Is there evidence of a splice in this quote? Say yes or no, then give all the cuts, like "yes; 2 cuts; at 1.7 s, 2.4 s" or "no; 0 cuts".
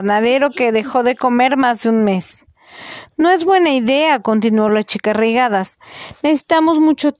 no; 0 cuts